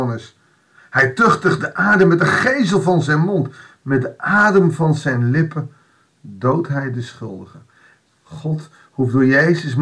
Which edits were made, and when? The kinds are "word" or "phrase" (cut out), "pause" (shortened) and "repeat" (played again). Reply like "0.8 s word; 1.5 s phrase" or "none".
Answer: none